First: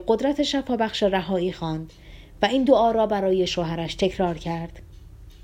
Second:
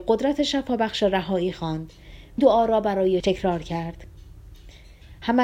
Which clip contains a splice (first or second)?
second